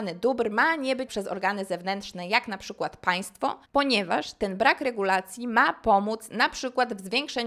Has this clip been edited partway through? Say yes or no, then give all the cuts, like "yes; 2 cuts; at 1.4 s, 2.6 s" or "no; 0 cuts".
yes; 2 cuts; at 1.1 s, 3.6 s